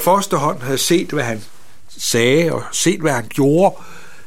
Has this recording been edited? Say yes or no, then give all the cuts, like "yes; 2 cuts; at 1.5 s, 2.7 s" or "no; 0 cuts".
no; 0 cuts